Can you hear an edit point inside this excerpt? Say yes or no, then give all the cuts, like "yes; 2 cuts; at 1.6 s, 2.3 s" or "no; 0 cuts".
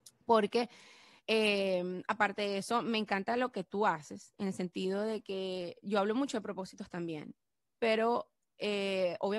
no; 0 cuts